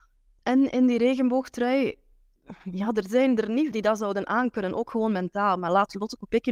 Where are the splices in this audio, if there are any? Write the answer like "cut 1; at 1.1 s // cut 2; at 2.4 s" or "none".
cut 1; at 3.7 s